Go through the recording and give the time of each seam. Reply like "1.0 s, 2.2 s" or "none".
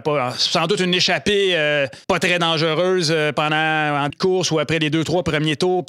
2.0 s, 4.1 s